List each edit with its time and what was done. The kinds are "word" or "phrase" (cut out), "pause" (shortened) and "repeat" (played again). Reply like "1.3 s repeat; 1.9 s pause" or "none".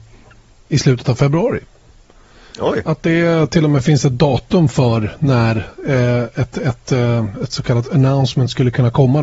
none